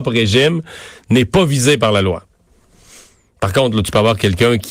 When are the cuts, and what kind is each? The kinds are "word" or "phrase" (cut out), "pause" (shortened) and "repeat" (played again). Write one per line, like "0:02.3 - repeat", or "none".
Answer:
none